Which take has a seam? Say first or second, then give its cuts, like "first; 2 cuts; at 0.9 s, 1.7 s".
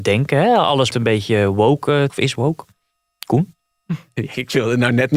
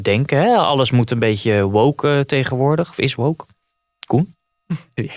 first; 2 cuts; at 0.9 s, 2.1 s